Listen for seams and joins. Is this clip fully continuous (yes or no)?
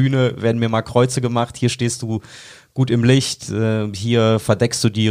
yes